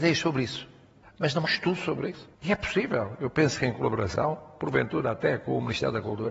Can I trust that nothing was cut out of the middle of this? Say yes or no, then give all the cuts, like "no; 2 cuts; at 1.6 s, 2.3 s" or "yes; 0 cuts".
no; 3 cuts; at 1.0 s, 1.4 s, 2.3 s